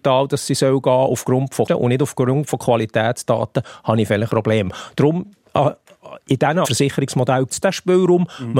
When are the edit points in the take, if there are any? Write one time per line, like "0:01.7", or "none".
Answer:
0:01.7
0:04.3
0:06.6
0:07.5